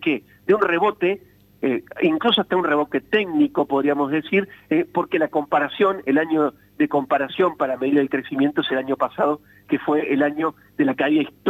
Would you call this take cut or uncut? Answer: uncut